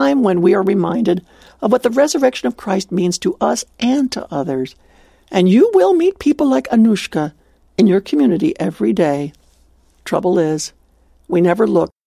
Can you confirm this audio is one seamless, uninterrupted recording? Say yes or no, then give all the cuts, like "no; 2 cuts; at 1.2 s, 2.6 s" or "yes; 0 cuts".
yes; 0 cuts